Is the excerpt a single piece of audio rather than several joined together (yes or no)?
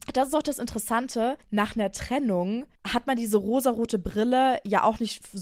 no